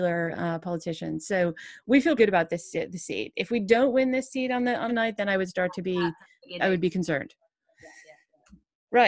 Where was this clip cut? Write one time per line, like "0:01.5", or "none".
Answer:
0:02.2
0:04.9
0:06.6